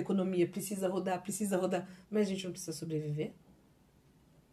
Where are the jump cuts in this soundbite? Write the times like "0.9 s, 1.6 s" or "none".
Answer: 2.0 s